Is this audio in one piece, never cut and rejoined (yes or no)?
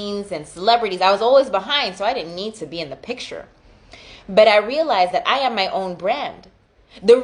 yes